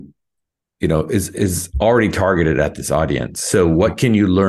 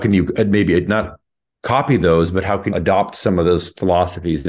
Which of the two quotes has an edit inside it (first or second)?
second